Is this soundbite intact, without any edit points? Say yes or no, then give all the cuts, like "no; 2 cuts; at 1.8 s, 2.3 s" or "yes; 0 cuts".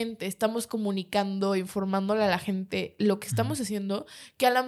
yes; 0 cuts